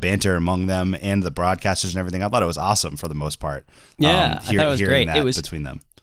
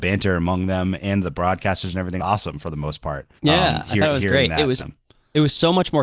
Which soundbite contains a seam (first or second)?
second